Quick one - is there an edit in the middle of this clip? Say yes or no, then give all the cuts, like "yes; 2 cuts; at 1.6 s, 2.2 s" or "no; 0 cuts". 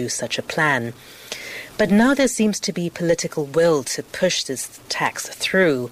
no; 0 cuts